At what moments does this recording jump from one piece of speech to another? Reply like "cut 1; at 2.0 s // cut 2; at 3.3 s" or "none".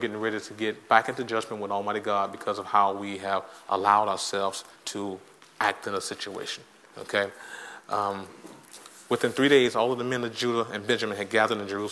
cut 1; at 4.8 s